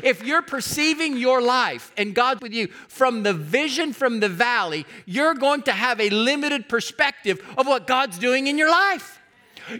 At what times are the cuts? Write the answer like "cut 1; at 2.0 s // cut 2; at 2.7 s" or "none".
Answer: cut 1; at 2.4 s